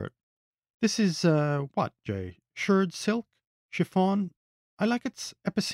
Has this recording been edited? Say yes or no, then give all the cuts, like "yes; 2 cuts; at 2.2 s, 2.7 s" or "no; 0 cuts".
no; 0 cuts